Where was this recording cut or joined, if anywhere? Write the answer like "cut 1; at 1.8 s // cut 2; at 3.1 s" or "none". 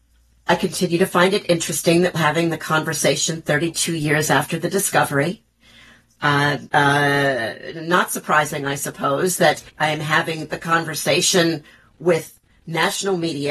cut 1; at 2.1 s // cut 2; at 6.7 s // cut 3; at 9.7 s